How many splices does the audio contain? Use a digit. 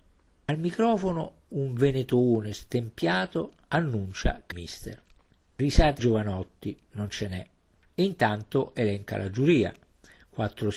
4